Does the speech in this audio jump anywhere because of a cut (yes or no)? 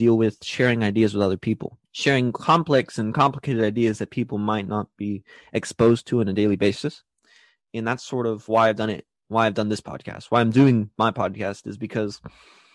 yes